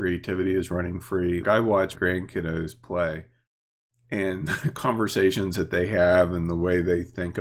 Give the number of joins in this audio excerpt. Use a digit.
2